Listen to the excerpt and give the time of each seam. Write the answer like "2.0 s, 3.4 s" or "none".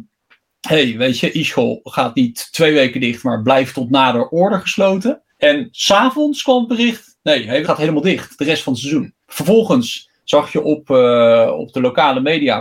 5.3 s, 7.6 s, 9.2 s